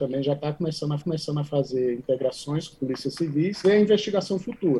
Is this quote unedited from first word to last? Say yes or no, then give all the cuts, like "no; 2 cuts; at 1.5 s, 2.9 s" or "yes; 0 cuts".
no; 3 cuts; at 1.0 s, 2.7 s, 3.6 s